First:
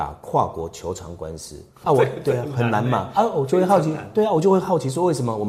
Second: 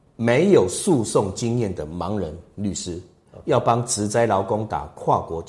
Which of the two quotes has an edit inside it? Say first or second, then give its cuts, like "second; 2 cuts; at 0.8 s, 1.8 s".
first; 1 cut; at 1.8 s